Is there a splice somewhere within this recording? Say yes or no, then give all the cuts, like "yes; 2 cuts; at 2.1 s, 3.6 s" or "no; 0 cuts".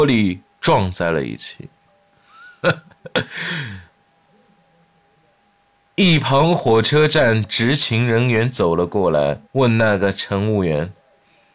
yes; 1 cut; at 9.5 s